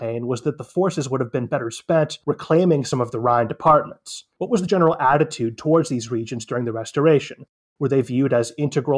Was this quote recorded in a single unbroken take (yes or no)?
yes